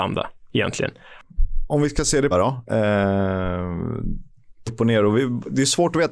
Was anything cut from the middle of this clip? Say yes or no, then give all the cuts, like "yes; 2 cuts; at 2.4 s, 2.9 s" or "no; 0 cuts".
yes; 2 cuts; at 2.3 s, 4.7 s